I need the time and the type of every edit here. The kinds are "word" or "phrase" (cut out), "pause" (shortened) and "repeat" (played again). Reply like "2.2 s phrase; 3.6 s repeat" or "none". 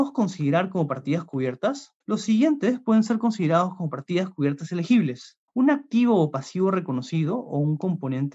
2.0 s pause; 5.5 s pause